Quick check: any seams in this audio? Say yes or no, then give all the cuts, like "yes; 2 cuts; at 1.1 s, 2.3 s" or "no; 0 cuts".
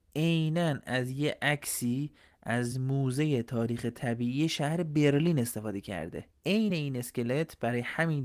no; 0 cuts